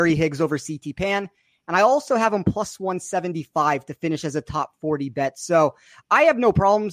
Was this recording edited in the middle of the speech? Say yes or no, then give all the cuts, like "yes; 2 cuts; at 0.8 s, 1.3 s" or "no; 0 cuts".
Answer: no; 0 cuts